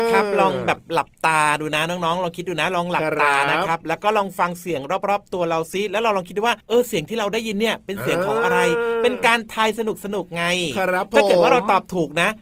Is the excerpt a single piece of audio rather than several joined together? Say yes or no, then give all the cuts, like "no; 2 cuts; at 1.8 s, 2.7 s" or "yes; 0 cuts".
no; 1 cut; at 6.6 s